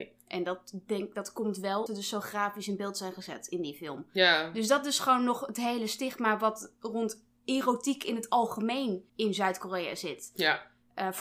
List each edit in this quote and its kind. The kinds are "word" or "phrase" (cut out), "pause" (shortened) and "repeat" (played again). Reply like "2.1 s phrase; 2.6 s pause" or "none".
1.9 s word; 9.1 s pause